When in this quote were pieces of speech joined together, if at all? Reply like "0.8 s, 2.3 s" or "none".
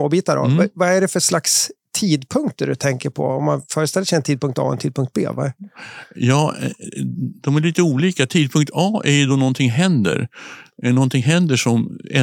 none